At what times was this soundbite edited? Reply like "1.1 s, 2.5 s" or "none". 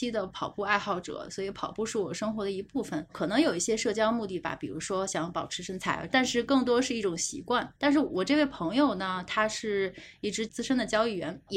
7.8 s